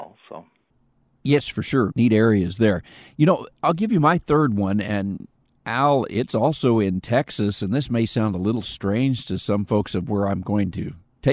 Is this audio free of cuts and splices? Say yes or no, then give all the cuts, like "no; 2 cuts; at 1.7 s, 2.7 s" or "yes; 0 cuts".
no; 1 cut; at 1.9 s